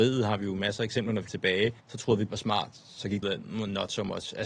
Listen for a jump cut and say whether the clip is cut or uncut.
cut